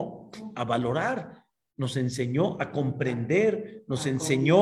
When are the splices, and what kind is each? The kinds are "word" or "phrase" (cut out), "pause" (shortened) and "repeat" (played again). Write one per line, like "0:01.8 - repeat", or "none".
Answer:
none

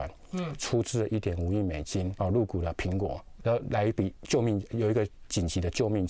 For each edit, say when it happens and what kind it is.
0:02.2 - word
0:03.4 - phrase

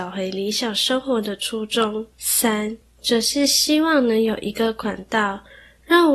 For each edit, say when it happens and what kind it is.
0:02.1 - pause

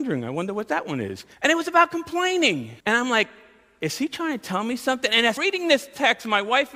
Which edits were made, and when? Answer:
0:01.3 - pause
0:02.8 - pause
0:05.4 - word

